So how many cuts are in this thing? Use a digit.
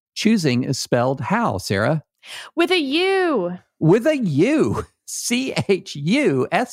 0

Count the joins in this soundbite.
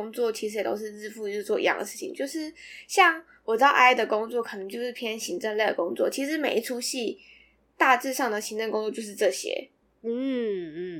0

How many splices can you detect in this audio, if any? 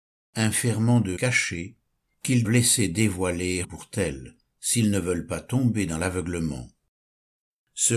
3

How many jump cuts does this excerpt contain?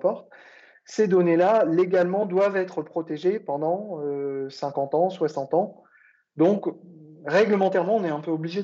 0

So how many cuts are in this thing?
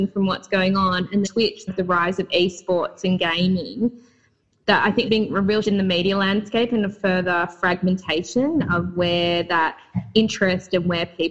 4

